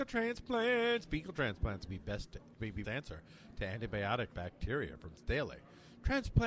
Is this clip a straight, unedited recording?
no; 5 cuts; at 1.9 s, 2.5 s, 2.8 s, 4.3 s, 5.1 s

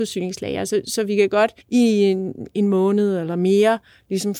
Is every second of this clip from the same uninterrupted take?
no; 1 cut; at 1.6 s

